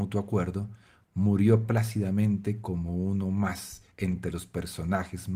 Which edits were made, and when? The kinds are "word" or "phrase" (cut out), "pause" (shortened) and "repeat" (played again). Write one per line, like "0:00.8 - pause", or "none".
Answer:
0:03.9 - pause